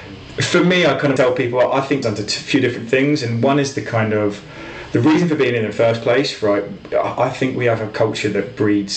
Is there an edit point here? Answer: yes; 2 cuts; at 1.2 s, 2.0 s

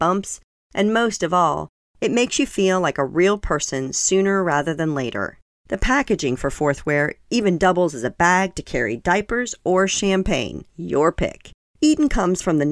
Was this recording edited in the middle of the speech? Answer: yes; 1 cut; at 10.7 s

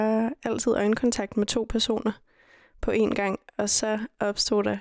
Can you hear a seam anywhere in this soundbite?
no; 0 cuts

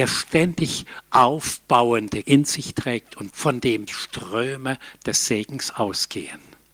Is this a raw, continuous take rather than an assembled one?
no; 3 cuts; at 2.2 s, 3.3 s, 3.9 s

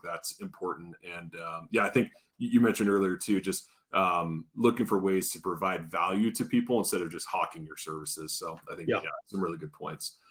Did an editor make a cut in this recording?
no; 0 cuts

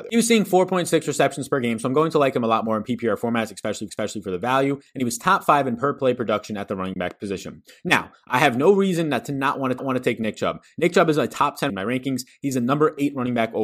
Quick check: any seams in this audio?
yes; 3 cuts; at 3.9 s, 9.8 s, 11.7 s

